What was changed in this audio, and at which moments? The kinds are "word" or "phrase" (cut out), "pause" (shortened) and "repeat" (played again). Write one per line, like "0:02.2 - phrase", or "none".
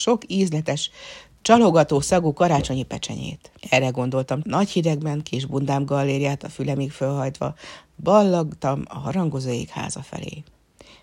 0:03.6 - pause
0:04.4 - phrase